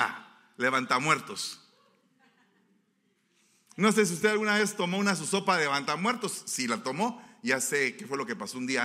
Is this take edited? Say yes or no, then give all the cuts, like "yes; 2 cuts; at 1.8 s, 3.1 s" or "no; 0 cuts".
no; 0 cuts